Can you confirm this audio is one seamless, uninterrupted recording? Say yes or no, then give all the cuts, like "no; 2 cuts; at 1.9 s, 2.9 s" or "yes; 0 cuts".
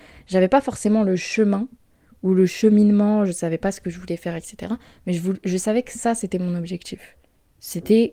yes; 0 cuts